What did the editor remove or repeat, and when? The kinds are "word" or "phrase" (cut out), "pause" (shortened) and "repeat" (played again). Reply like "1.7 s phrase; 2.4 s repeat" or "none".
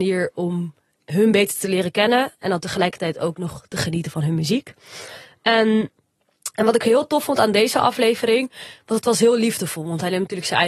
none